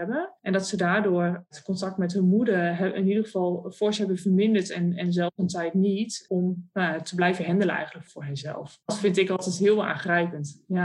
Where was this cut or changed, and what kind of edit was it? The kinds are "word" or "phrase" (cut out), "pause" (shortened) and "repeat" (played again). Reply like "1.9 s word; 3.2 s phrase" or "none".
8.1 s word